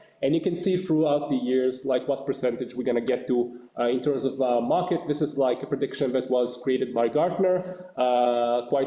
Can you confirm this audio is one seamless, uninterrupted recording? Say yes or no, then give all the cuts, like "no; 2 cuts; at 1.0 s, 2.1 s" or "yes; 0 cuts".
yes; 0 cuts